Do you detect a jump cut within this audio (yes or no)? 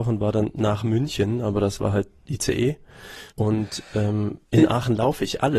yes